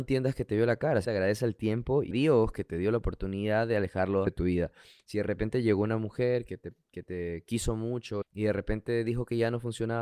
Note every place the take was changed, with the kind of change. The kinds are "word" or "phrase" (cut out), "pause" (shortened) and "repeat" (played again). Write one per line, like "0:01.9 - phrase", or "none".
0:01.0 - word
0:02.1 - word
0:04.3 - word
0:08.2 - word